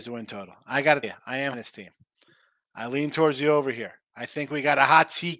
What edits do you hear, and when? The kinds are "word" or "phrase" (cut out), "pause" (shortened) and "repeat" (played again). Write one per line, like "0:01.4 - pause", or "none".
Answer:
0:01.0 - word
0:01.5 - word